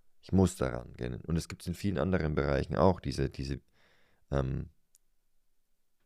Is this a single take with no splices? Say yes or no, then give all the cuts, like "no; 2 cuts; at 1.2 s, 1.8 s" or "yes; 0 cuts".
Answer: yes; 0 cuts